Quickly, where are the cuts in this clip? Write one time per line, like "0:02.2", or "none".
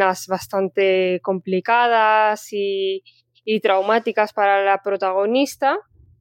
none